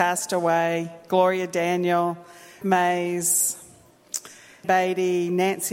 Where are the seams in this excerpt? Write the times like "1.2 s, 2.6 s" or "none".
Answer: 2.6 s, 4.6 s